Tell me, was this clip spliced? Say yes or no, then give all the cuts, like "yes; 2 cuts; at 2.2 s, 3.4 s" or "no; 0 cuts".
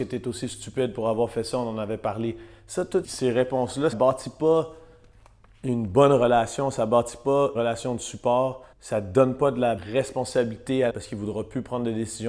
yes; 6 cuts; at 3.0 s, 3.9 s, 7.5 s, 8.7 s, 9.8 s, 10.9 s